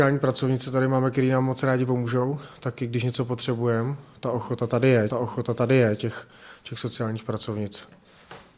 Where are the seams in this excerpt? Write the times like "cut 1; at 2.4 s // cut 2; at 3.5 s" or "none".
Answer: cut 1; at 5.1 s